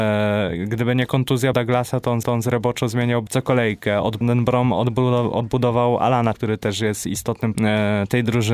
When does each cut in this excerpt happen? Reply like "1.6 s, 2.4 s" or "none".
1.5 s, 2.2 s, 3.3 s, 4.2 s, 6.3 s, 7.5 s